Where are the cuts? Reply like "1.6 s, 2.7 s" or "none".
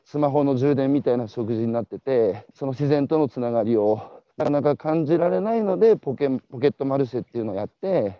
2.5 s, 4.3 s